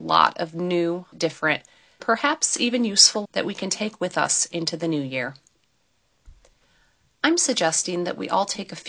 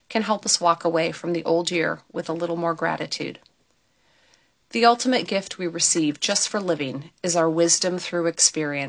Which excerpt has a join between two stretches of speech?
first; 3 cuts; at 1.1 s, 2.0 s, 3.2 s

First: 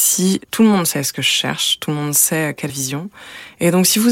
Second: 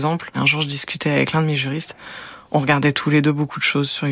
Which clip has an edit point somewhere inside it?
first; 1 cut; at 2.7 s

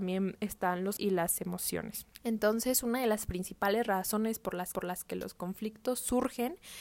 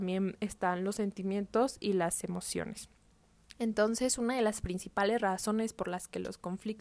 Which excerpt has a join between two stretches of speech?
first; 3 cuts; at 1.0 s, 2.1 s, 4.7 s

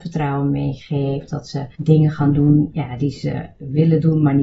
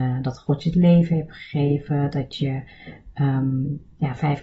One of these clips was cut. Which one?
first; 1 cut; at 1.7 s

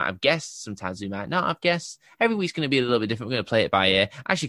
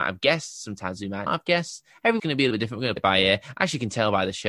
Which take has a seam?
second; 4 cuts; at 1.3 s, 2.2 s, 2.5 s, 3.0 s

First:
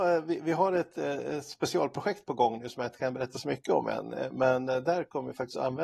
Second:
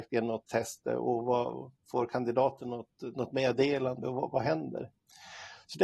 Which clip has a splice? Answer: second; 1 cut; at 1.8 s

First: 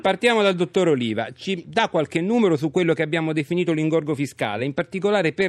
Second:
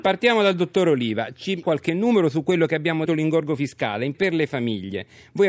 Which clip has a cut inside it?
second; 3 cuts; at 1.6 s, 3.1 s, 4.1 s

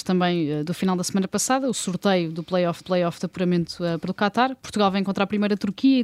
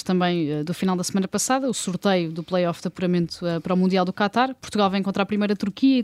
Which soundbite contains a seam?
first; 2 cuts; at 2.8 s, 4.1 s

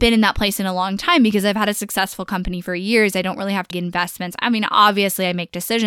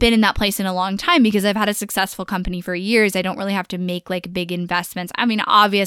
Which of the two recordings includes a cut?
first; 1 cut; at 3.7 s

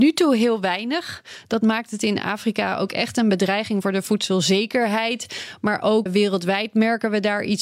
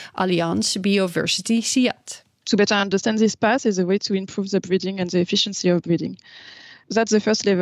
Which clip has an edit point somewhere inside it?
first; 1 cut; at 6.1 s

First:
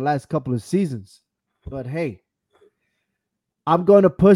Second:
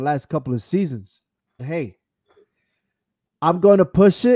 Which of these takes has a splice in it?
second; 1 cut; at 1.6 s

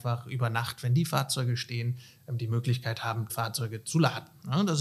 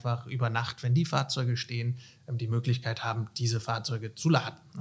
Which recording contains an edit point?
first; 1 cut; at 3.3 s

